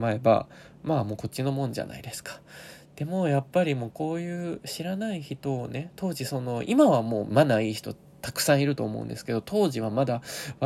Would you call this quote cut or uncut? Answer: uncut